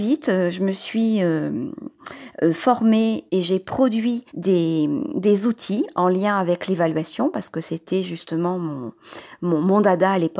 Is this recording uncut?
no; 2 cuts; at 3.3 s, 4.3 s

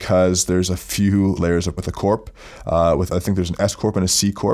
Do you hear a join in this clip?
yes; 3 cuts; at 1.4 s, 1.8 s, 3.1 s

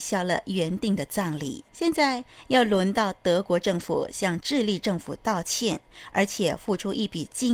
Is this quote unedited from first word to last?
no; 1 cut; at 1.7 s

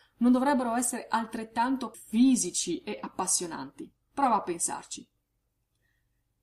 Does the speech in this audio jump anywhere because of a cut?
yes; 1 cut; at 1.9 s

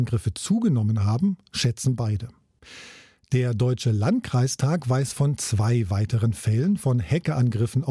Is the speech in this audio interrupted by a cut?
no; 0 cuts

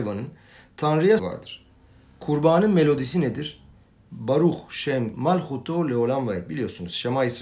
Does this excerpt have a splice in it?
yes; 2 cuts; at 1.2 s, 5.1 s

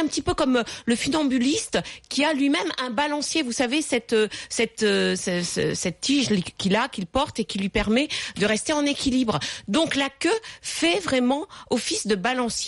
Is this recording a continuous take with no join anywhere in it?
yes; 0 cuts

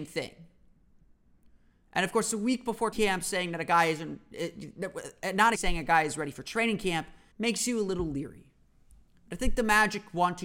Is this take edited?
yes; 3 cuts; at 2.9 s, 5.5 s, 7.3 s

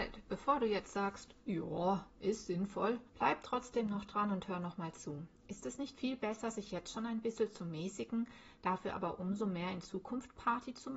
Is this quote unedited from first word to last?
no; 1 cut; at 3.1 s

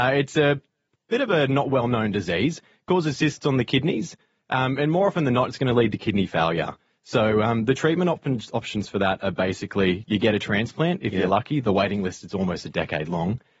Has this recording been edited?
no; 0 cuts

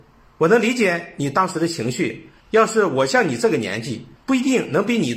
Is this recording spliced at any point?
yes; 2 cuts; at 2.4 s, 4.2 s

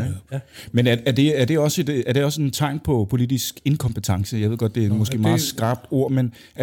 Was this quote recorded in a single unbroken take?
yes; 0 cuts

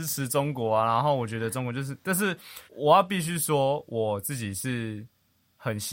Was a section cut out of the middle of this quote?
yes; 1 cut; at 2.7 s

